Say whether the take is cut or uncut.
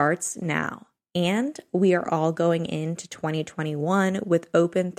uncut